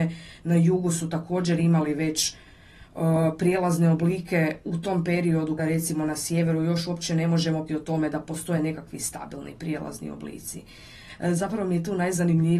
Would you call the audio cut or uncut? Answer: cut